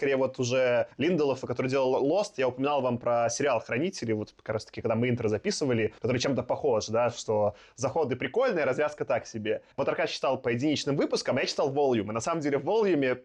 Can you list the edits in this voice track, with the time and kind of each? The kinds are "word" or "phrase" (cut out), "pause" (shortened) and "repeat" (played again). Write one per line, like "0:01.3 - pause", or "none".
0:00.9 - pause
0:06.0 - pause
0:09.7 - pause